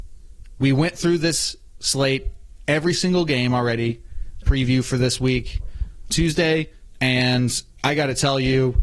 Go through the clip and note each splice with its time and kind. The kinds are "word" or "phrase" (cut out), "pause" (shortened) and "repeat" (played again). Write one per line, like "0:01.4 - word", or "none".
0:04.4 - phrase
0:06.1 - word